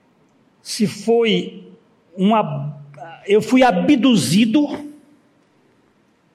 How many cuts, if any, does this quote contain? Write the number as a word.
zero